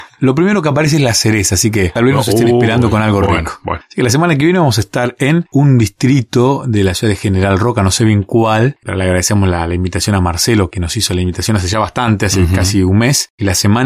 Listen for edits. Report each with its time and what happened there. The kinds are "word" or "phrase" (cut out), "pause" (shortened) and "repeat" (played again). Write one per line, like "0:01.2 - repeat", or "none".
0:02.0 - word
0:10.7 - word